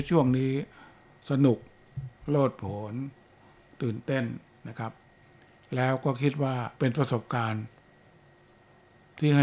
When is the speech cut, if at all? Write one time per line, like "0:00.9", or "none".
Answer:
0:06.7